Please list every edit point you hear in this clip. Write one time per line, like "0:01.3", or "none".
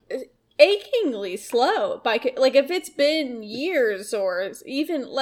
none